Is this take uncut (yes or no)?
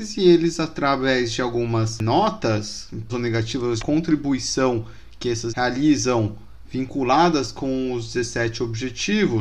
no